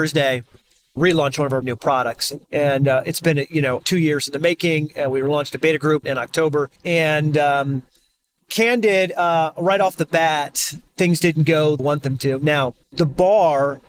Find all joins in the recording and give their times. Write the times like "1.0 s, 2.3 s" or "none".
1.6 s, 2.4 s, 3.8 s, 6.0 s, 6.8 s, 8.5 s, 10.9 s, 11.8 s, 12.8 s